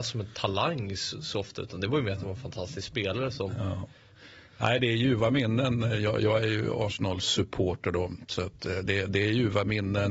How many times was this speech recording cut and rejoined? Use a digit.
0